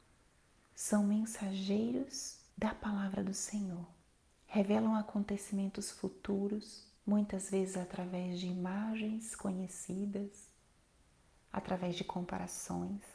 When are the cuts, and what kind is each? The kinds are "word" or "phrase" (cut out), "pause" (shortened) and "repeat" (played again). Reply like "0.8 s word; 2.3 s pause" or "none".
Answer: 2.5 s pause; 4.3 s pause; 7.0 s pause

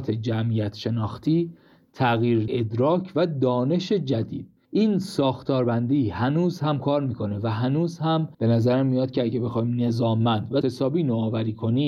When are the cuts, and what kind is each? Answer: 2.5 s word; 4.6 s pause; 8.3 s pause; 10.6 s word

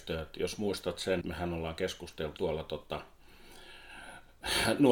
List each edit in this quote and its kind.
1.2 s word; 2.4 s word

